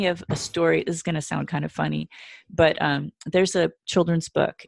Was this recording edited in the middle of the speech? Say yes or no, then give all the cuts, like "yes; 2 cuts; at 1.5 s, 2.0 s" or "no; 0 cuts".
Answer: no; 0 cuts